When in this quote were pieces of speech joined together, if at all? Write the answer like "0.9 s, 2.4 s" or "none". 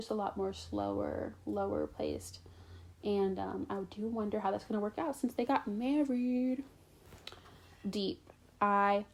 none